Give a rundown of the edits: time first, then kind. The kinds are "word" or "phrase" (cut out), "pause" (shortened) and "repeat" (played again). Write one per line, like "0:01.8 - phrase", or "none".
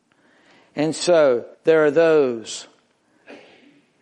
0:01.5 - pause